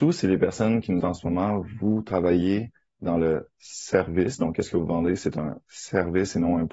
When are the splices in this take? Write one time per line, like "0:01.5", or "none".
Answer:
0:01.0